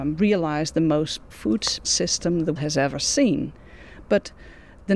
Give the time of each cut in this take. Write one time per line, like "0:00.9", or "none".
0:01.3
0:01.8
0:02.6